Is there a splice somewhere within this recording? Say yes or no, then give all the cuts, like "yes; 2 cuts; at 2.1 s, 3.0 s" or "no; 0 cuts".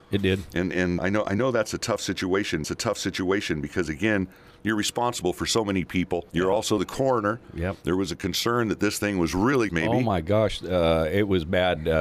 yes; 4 cuts; at 1.0 s, 2.6 s, 6.3 s, 9.7 s